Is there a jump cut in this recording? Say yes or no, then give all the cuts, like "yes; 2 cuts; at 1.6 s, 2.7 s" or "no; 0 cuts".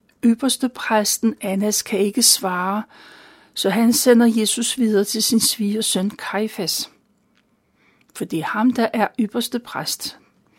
no; 0 cuts